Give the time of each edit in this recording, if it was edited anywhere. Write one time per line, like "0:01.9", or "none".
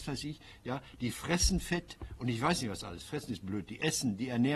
none